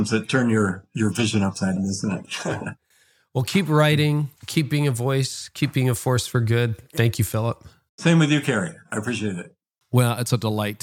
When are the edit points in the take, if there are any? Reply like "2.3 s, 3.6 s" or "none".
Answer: 1.8 s, 4.4 s